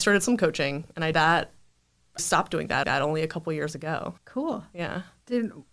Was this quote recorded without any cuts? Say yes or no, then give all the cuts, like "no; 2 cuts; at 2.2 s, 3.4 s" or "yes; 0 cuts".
no; 4 cuts; at 1.1 s, 2.2 s, 2.8 s, 4.2 s